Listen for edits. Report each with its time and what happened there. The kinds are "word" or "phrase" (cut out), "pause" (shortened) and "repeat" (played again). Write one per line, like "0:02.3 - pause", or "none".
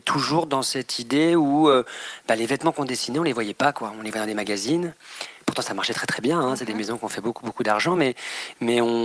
none